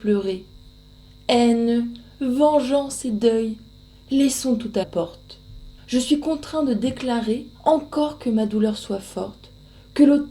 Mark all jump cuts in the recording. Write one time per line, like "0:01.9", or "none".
0:04.8
0:05.8
0:07.5